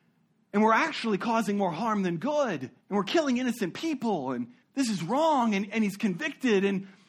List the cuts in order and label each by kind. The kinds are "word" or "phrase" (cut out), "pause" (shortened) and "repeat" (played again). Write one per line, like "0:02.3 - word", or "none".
0:02.8 - pause
0:04.6 - pause